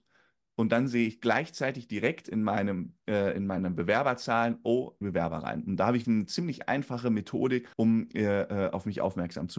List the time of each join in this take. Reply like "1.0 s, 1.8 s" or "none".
5.0 s, 6.0 s, 7.7 s